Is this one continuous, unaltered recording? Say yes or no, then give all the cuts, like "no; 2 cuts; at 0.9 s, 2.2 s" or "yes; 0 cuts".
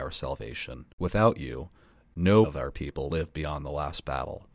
no; 3 cuts; at 0.9 s, 2.4 s, 3.1 s